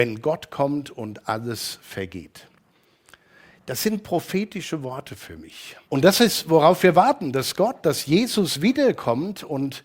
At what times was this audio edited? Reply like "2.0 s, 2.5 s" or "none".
5.8 s